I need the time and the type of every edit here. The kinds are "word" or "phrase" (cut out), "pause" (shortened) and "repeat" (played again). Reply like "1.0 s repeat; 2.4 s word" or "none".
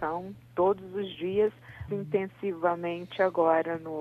1.9 s word

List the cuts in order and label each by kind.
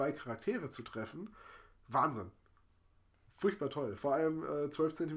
none

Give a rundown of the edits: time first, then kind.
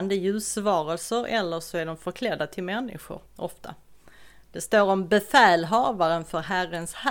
3.3 s pause

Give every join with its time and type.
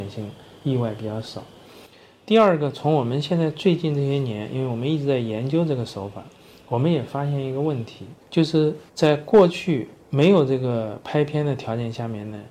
8.2 s pause; 8.9 s pause; 10.0 s pause

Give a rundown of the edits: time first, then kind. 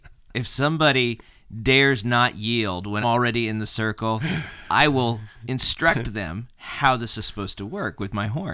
3.0 s word

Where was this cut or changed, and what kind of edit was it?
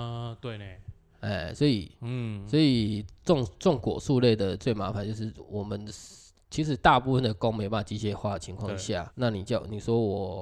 9.1 s word

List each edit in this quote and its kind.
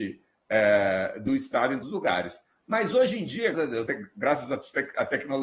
1.8 s word; 3.5 s word; 3.9 s word

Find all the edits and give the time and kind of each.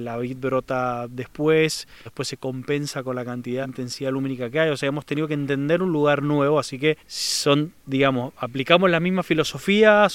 2.1 s word; 3.6 s word; 7.0 s pause

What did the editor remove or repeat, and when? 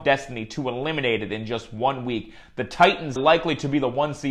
3.2 s word

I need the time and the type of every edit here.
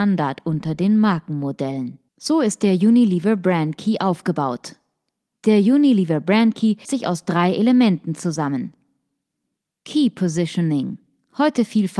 2.1 s pause; 6.8 s word

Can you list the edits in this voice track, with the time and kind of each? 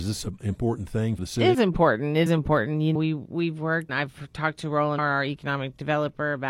1.2 s word; 1.5 s word; 2.3 s word; 2.9 s word; 3.9 s word; 5.0 s word

